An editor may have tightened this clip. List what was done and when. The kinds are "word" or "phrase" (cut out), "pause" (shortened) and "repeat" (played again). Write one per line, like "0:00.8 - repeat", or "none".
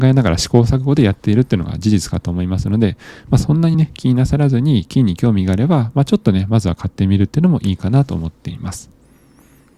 none